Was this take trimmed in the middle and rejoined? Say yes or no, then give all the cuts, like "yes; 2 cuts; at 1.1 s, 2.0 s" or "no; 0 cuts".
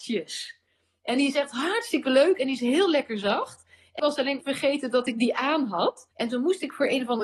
yes; 3 cuts; at 4.0 s, 4.4 s, 6.1 s